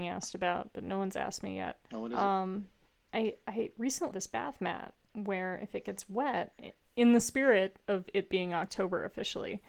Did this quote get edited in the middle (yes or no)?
yes